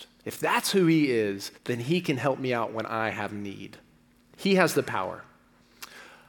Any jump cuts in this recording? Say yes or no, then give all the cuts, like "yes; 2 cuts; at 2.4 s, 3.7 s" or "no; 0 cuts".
yes; 2 cuts; at 1.6 s, 4.1 s